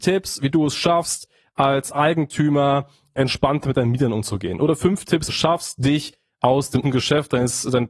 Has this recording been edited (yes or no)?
yes